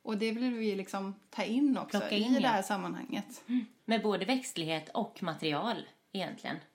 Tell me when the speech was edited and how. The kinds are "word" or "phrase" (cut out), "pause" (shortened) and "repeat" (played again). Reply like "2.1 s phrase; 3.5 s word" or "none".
3.8 s pause

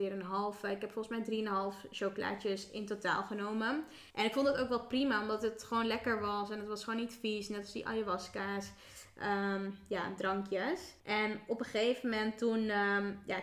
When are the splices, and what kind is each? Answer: 4.1 s pause; 11.0 s pause

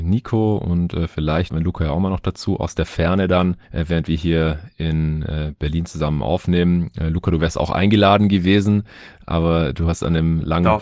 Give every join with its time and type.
1.5 s word

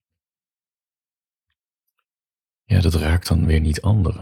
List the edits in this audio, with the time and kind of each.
none

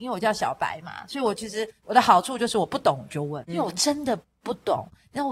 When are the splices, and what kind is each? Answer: 3.5 s word

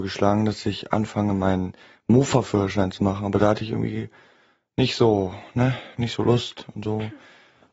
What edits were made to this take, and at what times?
none

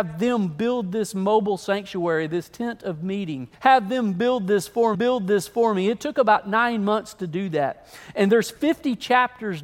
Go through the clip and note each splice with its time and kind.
3.5 s pause; 4.9 s repeat

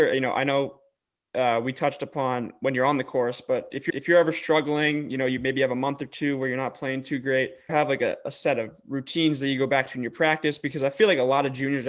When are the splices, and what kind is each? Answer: 3.9 s repeat; 7.7 s phrase

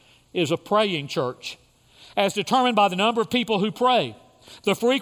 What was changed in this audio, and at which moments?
none

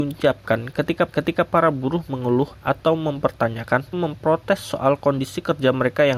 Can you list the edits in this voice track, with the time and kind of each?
1.1 s repeat; 3.9 s word

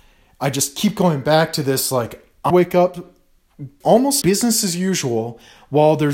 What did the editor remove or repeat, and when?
2.5 s word; 3.8 s phrase; 4.2 s word

